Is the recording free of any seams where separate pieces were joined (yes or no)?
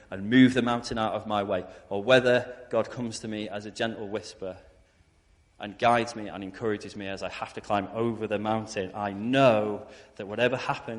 yes